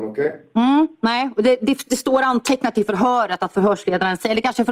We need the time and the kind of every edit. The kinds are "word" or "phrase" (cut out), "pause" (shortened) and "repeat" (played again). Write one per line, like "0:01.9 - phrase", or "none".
none